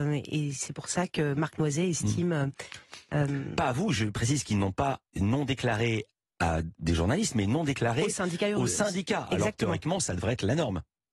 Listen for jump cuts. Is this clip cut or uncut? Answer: cut